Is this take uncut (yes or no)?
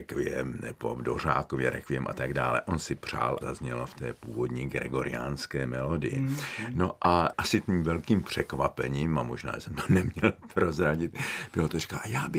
no